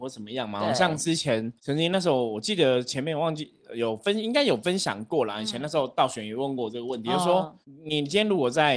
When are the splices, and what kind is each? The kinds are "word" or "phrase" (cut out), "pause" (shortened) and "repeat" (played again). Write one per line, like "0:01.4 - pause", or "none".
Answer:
0:01.6 - pause
0:07.6 - pause